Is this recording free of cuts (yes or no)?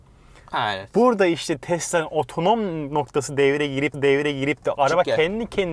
no